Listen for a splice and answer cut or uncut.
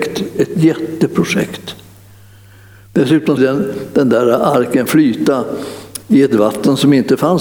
cut